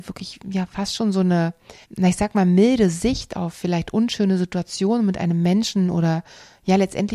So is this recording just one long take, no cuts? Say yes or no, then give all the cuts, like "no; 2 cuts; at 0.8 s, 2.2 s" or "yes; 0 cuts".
no; 1 cut; at 1.8 s